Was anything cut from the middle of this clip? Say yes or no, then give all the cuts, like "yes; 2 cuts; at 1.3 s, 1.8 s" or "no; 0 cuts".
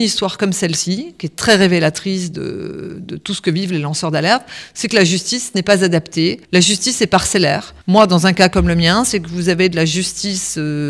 yes; 2 cuts; at 6.4 s, 7.8 s